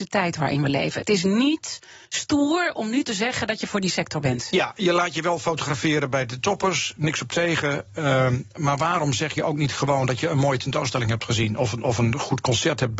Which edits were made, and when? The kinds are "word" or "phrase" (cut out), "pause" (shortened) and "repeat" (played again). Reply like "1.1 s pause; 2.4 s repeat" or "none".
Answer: 2.1 s pause